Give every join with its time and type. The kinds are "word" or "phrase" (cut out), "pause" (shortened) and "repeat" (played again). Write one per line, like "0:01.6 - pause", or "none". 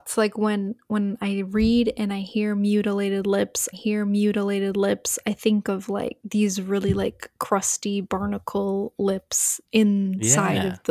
0:03.7 - repeat
0:09.6 - pause